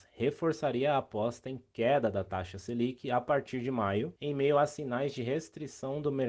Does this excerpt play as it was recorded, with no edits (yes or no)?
yes